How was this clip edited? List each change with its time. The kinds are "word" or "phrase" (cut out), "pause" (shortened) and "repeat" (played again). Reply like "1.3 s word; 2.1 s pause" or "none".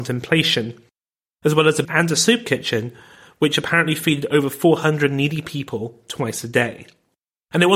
1.8 s word